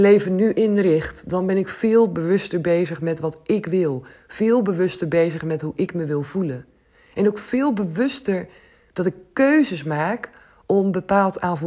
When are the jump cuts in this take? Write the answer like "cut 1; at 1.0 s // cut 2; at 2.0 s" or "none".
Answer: none